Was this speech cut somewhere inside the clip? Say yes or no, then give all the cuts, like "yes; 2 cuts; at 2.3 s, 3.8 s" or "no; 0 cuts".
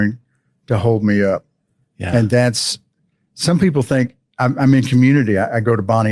no; 0 cuts